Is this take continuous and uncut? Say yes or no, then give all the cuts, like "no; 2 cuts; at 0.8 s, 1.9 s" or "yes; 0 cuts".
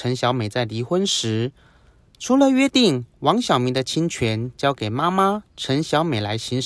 yes; 0 cuts